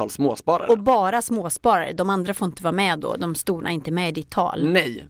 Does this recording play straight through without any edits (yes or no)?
no